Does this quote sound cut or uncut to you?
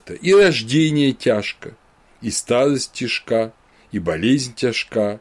uncut